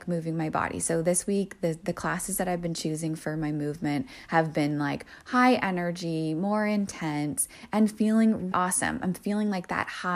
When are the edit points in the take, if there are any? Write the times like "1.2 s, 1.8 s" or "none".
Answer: 8.5 s